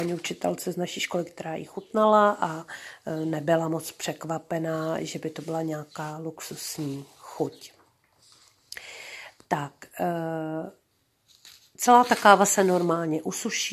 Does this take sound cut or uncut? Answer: uncut